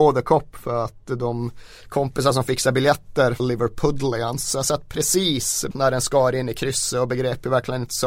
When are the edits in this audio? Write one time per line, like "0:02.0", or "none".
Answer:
0:03.4
0:05.7